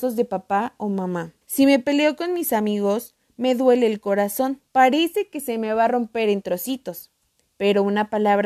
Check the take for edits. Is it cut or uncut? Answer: cut